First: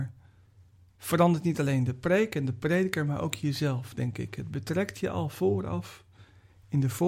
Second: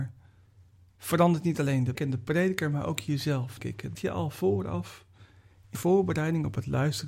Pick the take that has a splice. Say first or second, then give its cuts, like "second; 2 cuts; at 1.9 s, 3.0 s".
second; 4 cuts; at 1.9 s, 3.6 s, 3.9 s, 5.7 s